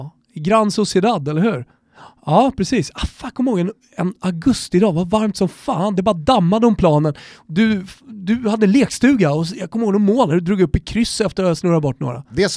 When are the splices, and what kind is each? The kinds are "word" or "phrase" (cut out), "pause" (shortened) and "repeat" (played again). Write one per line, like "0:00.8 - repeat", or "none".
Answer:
none